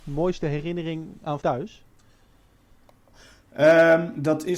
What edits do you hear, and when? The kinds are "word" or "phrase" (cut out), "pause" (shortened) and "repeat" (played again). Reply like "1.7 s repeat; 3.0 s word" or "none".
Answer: 1.4 s word